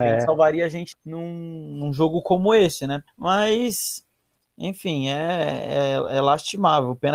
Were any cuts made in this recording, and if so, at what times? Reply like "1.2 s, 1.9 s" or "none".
0.9 s, 3.1 s

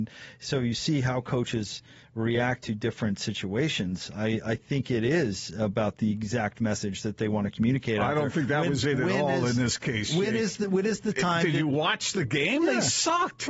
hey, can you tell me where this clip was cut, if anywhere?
none

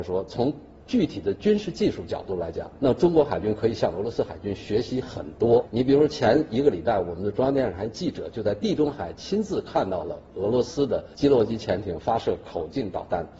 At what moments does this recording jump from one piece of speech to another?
11.1 s

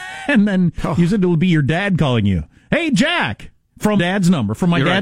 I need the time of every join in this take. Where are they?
4.0 s

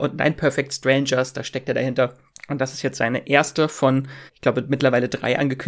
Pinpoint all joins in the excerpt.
2.3 s, 4.3 s

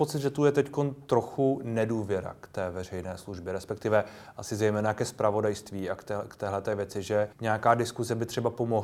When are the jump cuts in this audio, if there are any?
7.3 s

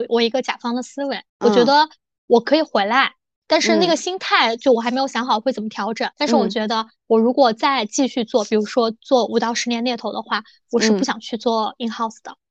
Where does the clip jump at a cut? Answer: 1.3 s, 6.1 s

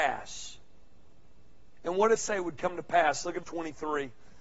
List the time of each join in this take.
2.2 s, 3.4 s

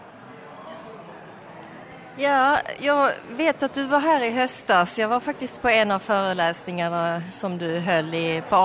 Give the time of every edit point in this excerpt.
2.8 s

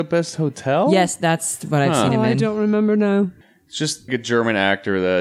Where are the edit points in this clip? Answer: 3.4 s, 4.1 s

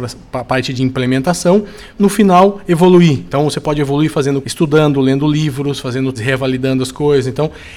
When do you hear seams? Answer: 2.0 s, 4.4 s, 6.2 s

